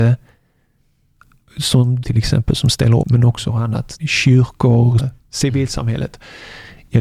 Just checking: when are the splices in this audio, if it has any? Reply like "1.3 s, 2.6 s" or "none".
2.0 s, 3.0 s, 3.5 s, 4.0 s, 5.0 s